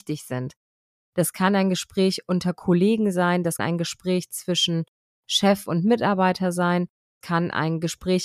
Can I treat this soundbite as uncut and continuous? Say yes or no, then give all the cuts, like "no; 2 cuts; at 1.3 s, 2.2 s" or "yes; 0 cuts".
no; 2 cuts; at 3.6 s, 7.2 s